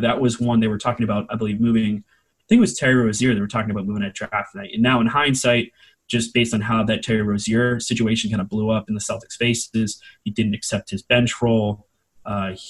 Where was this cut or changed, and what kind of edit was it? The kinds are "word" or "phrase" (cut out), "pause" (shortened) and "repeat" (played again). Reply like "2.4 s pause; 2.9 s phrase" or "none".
none